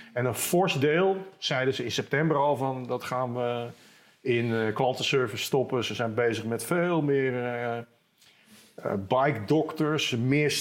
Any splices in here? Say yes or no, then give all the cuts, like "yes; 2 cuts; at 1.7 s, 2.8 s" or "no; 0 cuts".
no; 0 cuts